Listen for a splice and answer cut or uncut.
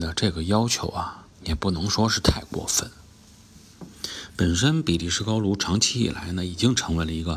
cut